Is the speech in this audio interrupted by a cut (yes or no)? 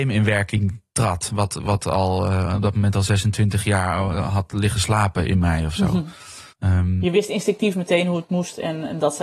yes